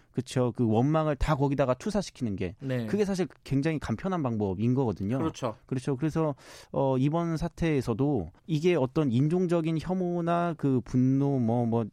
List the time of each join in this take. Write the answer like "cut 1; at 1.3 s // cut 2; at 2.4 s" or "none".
cut 1; at 8.4 s